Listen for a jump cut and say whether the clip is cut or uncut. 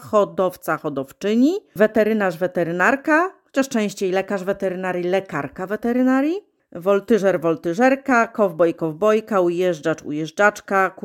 uncut